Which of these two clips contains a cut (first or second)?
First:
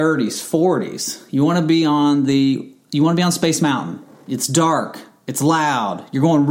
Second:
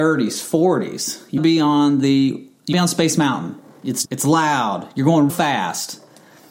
second